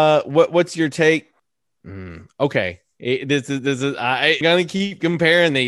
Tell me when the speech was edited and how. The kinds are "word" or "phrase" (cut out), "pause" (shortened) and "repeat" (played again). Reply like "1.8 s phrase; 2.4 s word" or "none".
4.4 s word